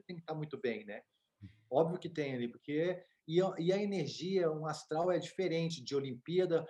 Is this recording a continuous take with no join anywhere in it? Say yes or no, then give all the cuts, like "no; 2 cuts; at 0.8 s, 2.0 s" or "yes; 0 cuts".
yes; 0 cuts